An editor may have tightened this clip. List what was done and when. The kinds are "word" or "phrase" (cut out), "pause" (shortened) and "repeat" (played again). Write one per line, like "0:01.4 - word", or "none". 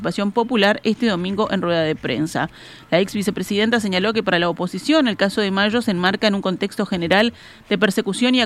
none